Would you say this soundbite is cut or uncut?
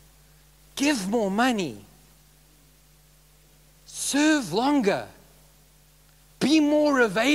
uncut